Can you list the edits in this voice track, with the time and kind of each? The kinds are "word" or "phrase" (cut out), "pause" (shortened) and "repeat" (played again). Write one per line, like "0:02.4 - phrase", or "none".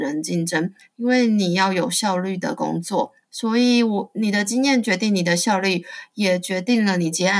0:03.2 - pause